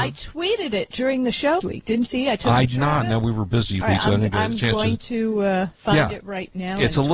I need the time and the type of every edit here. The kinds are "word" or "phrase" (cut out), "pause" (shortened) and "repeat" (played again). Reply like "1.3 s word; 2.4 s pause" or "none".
1.6 s word; 2.0 s word; 2.7 s word; 3.8 s word; 5.7 s pause